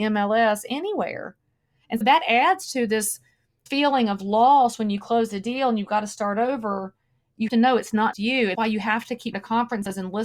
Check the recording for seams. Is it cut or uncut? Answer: cut